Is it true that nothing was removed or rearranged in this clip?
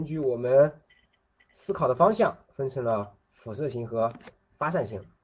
yes; 0 cuts

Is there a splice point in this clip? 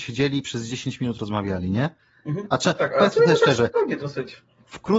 no; 0 cuts

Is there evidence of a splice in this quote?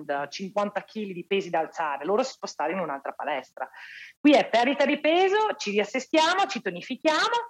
yes; 1 cut; at 2.3 s

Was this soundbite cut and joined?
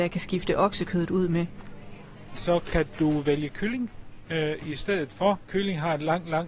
no; 0 cuts

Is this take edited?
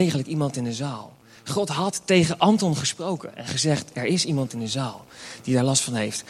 no; 0 cuts

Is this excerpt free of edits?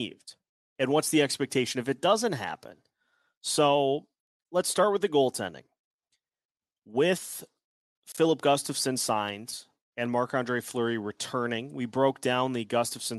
yes; 0 cuts

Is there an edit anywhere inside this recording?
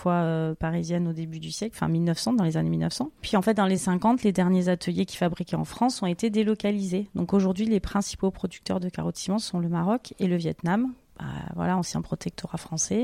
yes; 1 cut; at 3.8 s

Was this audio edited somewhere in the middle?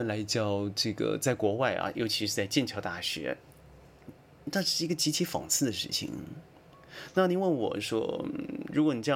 no; 0 cuts

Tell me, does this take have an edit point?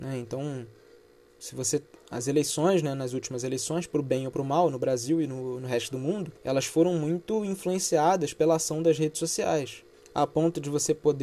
yes; 2 cuts; at 6.4 s, 9.9 s

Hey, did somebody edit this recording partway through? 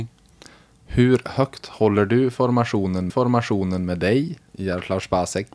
yes; 1 cut; at 3.1 s

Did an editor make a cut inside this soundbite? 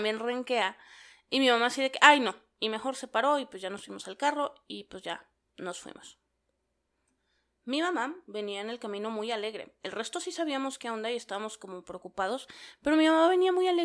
no; 0 cuts

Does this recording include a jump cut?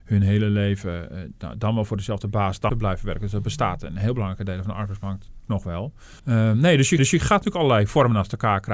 yes; 4 cuts; at 2.7 s, 5.5 s, 6.2 s, 7.0 s

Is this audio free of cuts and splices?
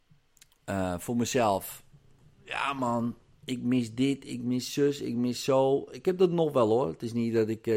yes; 0 cuts

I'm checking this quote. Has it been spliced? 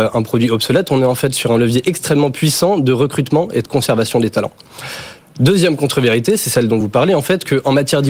no; 0 cuts

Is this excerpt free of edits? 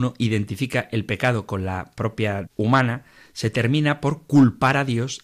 no; 1 cut; at 2.4 s

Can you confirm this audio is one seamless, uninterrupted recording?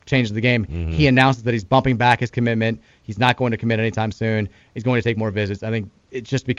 yes; 0 cuts

